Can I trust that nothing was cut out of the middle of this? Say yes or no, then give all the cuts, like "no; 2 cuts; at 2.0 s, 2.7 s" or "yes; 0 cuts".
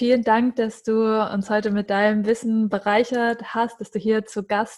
yes; 0 cuts